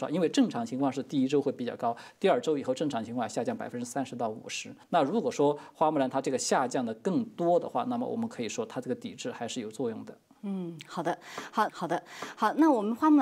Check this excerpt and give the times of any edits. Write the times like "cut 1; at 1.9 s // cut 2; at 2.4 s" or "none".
cut 1; at 4.8 s // cut 2; at 11.7 s